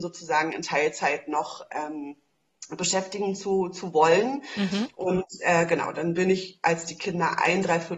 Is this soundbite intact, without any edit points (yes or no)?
yes